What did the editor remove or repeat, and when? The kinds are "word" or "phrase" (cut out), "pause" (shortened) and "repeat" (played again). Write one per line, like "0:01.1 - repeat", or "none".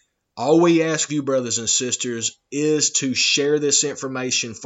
0:01.1 - word